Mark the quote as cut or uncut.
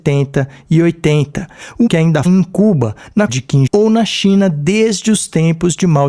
cut